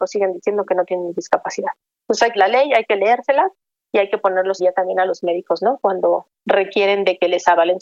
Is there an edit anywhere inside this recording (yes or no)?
yes